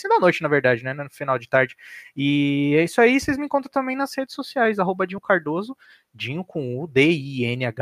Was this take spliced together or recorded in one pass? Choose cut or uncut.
uncut